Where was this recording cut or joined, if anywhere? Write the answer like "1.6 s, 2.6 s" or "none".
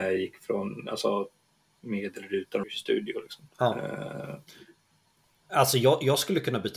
2.6 s, 3.5 s